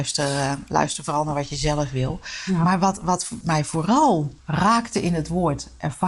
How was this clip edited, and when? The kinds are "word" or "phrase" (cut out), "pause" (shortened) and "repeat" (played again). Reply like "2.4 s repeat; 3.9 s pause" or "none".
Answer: 3.4 s word; 4.4 s pause